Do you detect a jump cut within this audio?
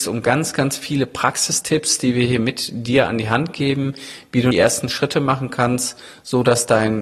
yes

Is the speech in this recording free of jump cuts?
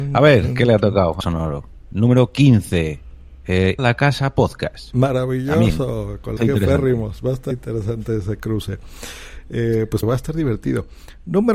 no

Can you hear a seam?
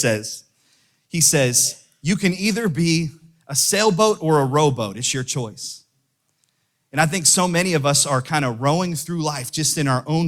no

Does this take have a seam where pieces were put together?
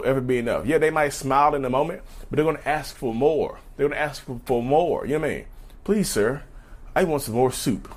no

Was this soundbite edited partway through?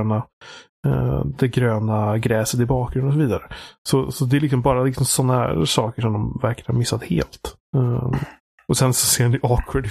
no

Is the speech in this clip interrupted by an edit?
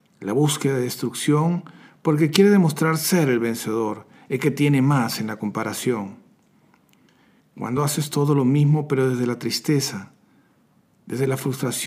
no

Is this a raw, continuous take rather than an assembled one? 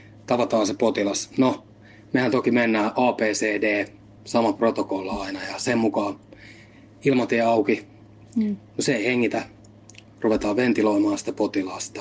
yes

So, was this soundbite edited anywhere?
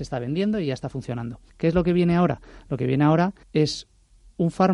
yes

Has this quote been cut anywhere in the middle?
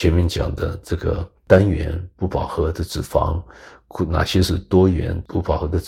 yes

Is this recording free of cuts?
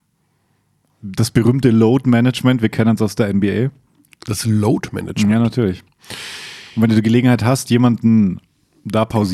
yes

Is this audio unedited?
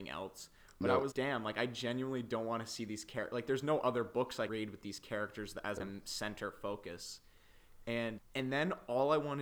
no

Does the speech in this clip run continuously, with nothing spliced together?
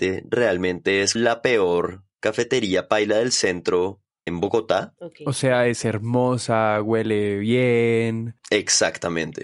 no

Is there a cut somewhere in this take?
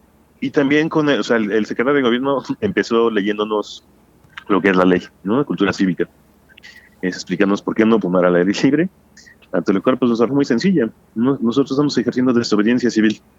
yes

